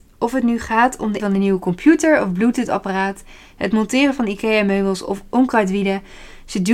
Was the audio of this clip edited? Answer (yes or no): yes